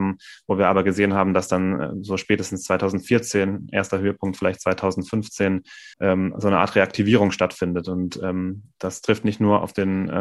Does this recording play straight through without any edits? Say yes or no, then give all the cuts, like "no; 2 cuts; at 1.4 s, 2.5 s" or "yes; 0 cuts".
no; 1 cut; at 5.9 s